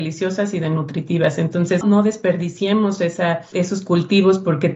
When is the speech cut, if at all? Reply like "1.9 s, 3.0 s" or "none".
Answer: 1.8 s, 3.5 s